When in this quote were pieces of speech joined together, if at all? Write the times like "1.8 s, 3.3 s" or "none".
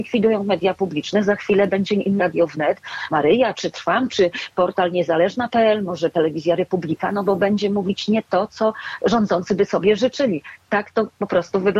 2.2 s, 3.1 s, 3.7 s